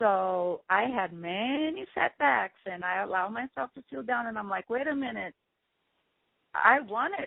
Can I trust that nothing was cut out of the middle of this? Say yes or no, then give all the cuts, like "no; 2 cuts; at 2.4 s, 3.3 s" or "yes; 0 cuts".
yes; 0 cuts